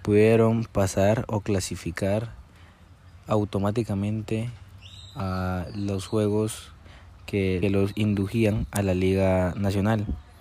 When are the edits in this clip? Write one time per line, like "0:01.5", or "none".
0:07.6